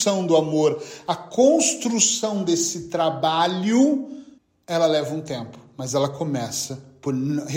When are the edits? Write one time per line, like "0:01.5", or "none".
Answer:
0:04.4